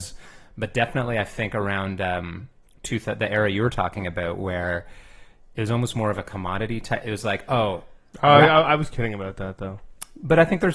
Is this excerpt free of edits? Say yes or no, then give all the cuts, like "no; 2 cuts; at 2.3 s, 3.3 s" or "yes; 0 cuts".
yes; 0 cuts